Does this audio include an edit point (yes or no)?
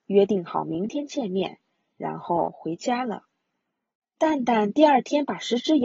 no